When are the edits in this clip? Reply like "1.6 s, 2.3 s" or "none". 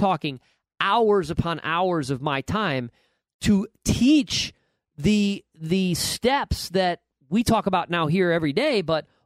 none